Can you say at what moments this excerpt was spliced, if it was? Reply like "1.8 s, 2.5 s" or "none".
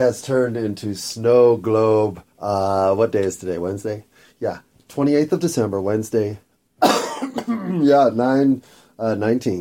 2.3 s